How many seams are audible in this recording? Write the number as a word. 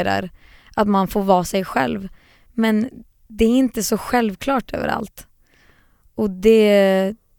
zero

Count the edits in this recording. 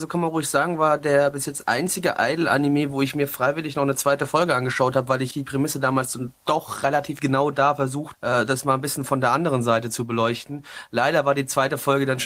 three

